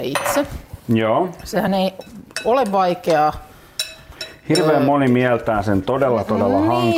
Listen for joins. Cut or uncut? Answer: uncut